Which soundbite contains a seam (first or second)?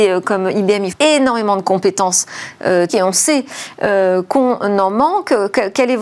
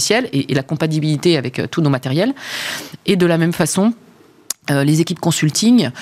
first